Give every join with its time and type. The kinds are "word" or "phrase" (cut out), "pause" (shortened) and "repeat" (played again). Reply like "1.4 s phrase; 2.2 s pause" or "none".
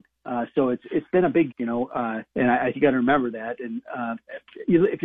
1.5 s word; 2.3 s pause; 2.7 s word